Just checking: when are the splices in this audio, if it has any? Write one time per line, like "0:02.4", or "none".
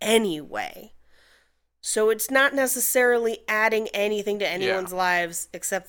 none